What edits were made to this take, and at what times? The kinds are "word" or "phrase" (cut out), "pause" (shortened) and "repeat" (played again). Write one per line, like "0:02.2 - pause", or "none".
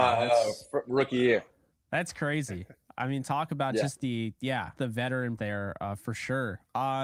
0:04.8 - word
0:05.4 - word